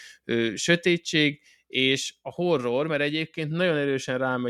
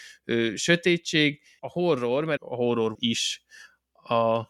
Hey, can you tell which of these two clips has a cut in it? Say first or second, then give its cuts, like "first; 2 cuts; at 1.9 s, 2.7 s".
second; 3 cuts; at 1.6 s, 2.4 s, 2.9 s